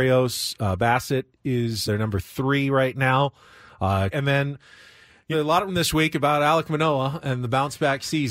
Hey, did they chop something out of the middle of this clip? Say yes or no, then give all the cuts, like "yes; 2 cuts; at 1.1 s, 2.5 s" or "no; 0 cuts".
yes; 4 cuts; at 1.9 s, 4.1 s, 5.3 s, 5.7 s